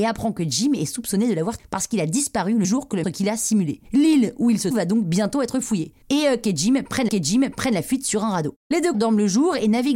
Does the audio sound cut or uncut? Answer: cut